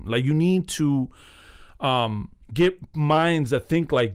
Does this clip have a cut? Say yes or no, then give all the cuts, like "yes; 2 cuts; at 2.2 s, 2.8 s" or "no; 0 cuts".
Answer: yes; 1 cut; at 2.4 s